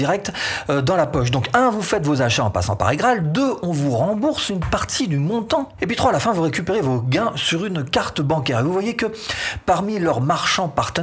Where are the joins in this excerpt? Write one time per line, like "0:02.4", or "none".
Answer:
0:05.8